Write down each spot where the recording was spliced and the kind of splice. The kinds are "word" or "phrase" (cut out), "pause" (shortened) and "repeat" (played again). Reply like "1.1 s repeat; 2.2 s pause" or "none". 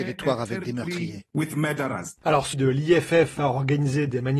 2.5 s word

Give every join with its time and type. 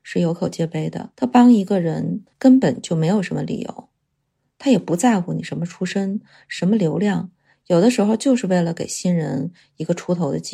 1.1 s pause; 2.3 s pause

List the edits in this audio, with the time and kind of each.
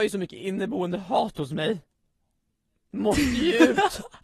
none

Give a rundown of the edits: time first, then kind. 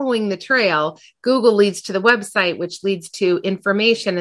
none

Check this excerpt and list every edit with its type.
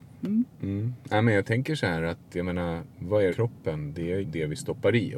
3.3 s phrase; 4.2 s word

